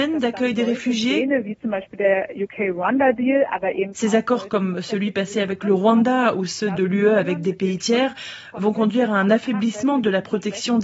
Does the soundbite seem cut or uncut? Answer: uncut